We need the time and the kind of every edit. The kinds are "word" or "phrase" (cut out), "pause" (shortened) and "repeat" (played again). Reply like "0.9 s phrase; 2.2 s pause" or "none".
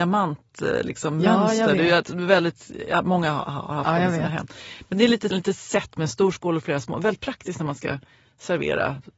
5.3 s word